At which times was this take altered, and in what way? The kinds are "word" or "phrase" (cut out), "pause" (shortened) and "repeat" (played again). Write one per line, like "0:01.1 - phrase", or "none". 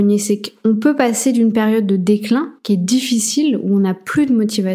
0:02.6 - pause